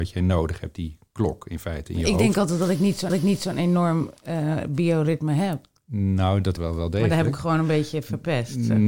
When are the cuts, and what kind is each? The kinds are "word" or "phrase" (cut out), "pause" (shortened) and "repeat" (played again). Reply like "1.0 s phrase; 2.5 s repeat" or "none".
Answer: 3.1 s repeat; 6.6 s phrase

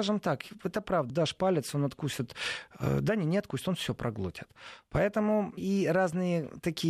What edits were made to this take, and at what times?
1.1 s word; 5.6 s word

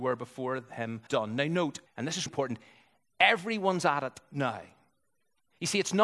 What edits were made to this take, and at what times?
1.1 s word; 1.9 s pause; 2.3 s word

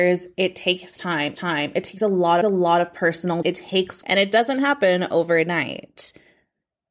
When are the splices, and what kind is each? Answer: 1.4 s repeat; 2.4 s repeat; 3.4 s word; 4.0 s word

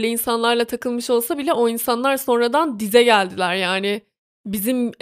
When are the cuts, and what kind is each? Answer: none

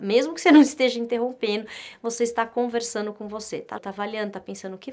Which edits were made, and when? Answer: 3.8 s word

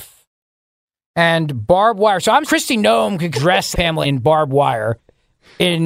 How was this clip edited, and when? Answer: 2.5 s word; 3.3 s phrase; 3.7 s word; 4.0 s word

